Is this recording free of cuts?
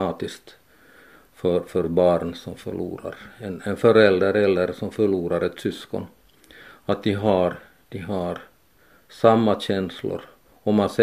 yes; 0 cuts

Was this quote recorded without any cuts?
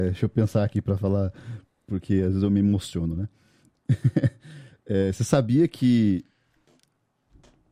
yes; 0 cuts

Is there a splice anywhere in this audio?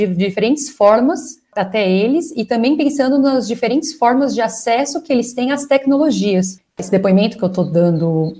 no; 0 cuts

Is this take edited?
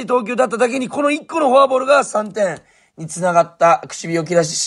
no; 0 cuts

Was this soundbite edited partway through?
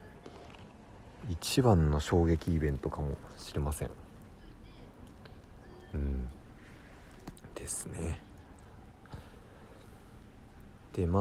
no; 0 cuts

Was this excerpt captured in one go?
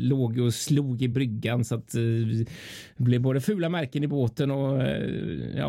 yes; 0 cuts

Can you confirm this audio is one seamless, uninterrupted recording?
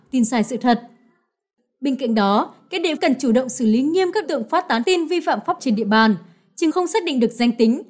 no; 5 cuts; at 3.0 s, 4.2 s, 4.8 s, 5.6 s, 6.7 s

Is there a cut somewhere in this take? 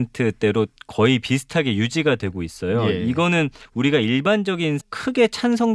yes; 2 cuts; at 3.6 s, 4.8 s

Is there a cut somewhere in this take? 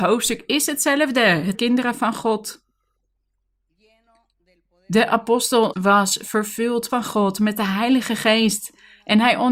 yes; 3 cuts; at 1.5 s, 5.7 s, 6.9 s

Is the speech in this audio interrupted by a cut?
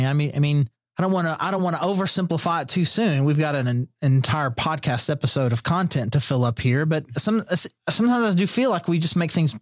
no; 0 cuts

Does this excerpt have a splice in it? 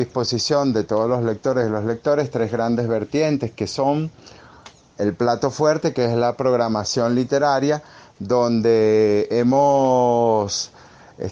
no; 0 cuts

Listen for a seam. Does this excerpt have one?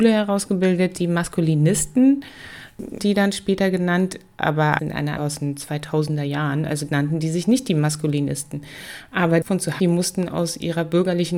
yes; 6 cuts; at 3.0 s, 4.8 s, 5.2 s, 6.9 s, 9.4 s, 9.8 s

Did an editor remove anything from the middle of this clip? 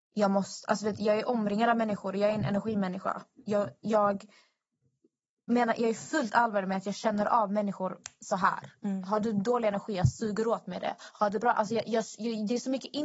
no; 0 cuts

